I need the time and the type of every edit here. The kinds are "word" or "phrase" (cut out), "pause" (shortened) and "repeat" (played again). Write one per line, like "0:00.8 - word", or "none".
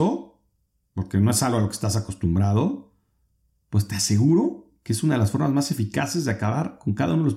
none